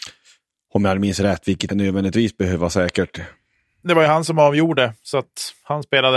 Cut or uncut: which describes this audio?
cut